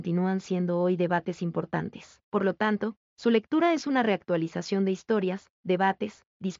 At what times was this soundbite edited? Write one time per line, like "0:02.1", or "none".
0:02.2